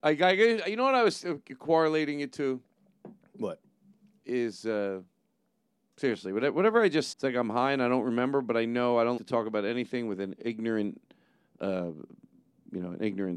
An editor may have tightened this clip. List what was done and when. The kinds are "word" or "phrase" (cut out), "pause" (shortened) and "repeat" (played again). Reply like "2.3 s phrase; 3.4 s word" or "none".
7.1 s word; 9.2 s word

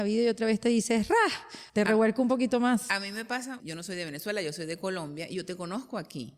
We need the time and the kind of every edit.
1.7 s pause; 3.6 s phrase

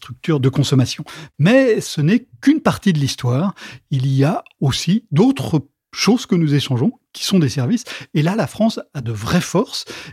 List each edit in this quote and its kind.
none

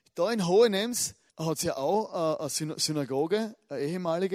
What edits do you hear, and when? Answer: 1.3 s pause

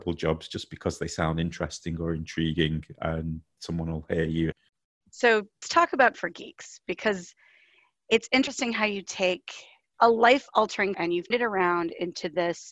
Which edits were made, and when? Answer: 5.6 s word; 6.1 s word; 10.9 s word; 11.3 s word

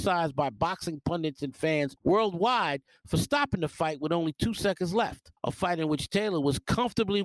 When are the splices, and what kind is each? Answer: 2.0 s pause; 5.4 s pause

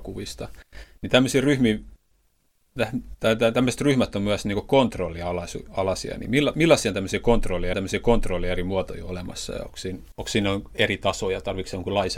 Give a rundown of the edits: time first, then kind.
7.7 s repeat

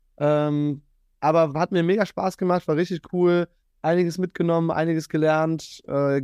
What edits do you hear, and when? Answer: none

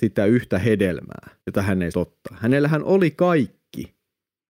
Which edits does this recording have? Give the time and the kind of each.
1.4 s pause; 1.9 s word

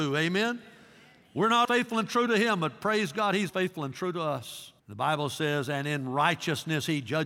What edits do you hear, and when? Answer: 1.6 s word; 3.5 s word; 4.8 s pause

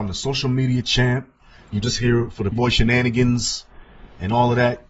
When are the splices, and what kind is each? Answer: 1.8 s phrase; 2.5 s word

